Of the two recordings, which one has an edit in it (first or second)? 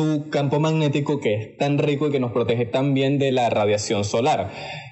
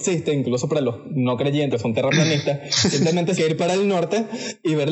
second